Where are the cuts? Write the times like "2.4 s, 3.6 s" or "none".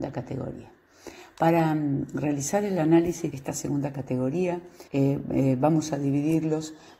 3.3 s, 4.9 s